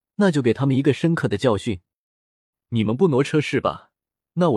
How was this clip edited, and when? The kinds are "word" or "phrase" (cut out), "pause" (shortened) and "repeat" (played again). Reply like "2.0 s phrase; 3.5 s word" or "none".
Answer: none